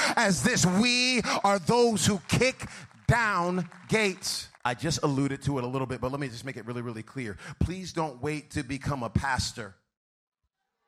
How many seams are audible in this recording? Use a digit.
1